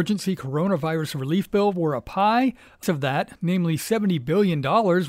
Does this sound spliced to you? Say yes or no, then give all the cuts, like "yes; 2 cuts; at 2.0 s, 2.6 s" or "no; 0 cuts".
yes; 1 cut; at 2.8 s